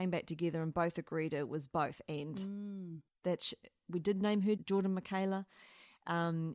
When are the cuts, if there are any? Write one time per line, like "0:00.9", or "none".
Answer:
0:04.6